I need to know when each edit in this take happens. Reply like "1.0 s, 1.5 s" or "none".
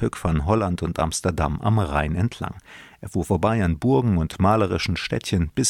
none